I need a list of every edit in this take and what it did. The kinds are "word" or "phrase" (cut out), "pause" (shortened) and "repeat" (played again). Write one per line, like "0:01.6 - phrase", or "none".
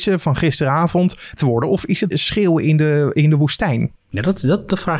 0:01.4 - word
0:02.1 - phrase